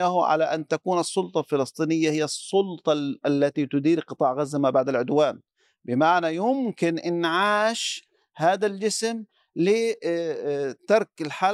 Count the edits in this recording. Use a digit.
0